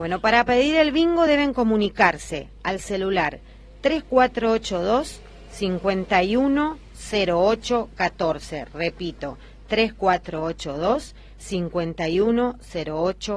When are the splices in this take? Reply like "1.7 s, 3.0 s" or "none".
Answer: none